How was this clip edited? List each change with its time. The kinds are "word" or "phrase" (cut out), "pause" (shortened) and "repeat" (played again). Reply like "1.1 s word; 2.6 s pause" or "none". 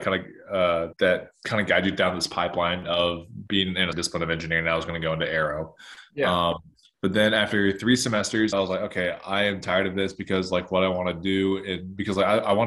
0.9 s word; 3.9 s word; 8.5 s word